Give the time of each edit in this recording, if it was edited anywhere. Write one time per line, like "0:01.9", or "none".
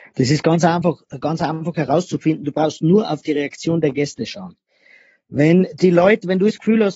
none